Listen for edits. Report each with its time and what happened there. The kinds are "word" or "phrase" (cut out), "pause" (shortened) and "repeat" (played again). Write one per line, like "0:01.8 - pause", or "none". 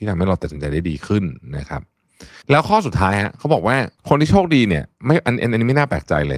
0:02.4 - pause
0:04.0 - pause